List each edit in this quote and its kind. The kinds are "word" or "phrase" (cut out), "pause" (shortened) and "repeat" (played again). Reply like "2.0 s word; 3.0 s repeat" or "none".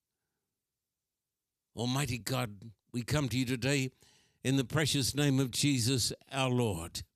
none